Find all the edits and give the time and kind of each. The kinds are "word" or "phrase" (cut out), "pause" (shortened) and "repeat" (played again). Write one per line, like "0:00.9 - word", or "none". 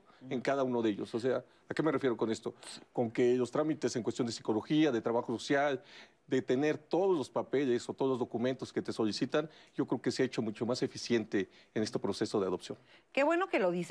none